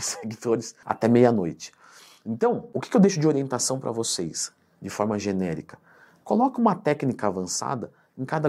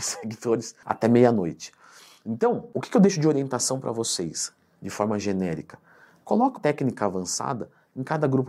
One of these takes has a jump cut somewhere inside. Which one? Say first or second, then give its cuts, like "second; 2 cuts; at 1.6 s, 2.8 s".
second; 1 cut; at 6.6 s